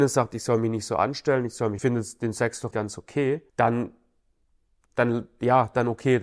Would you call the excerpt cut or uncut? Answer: cut